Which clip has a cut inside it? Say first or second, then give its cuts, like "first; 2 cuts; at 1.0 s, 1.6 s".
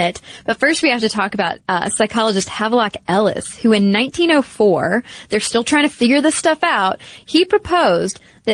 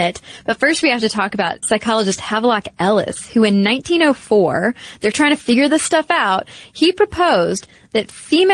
second; 2 cuts; at 1.6 s, 5.1 s